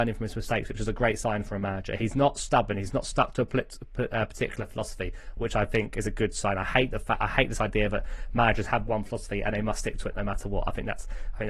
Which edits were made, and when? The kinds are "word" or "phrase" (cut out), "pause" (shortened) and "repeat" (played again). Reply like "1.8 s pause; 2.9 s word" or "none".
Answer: none